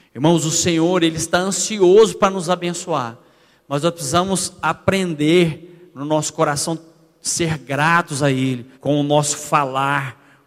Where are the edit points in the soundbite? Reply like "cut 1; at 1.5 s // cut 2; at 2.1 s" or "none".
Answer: cut 1; at 8.7 s

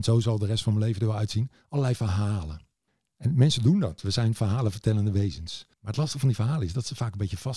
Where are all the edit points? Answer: cut 1; at 2.9 s // cut 2; at 5.7 s

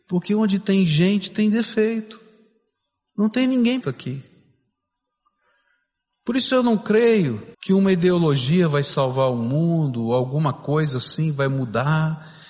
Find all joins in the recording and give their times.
cut 1; at 3.8 s // cut 2; at 7.5 s

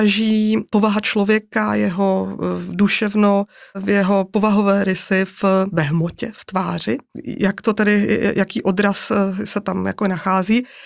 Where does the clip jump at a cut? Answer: none

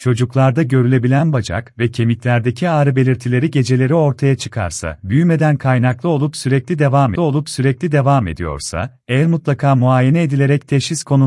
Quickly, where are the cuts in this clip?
cut 1; at 7.2 s

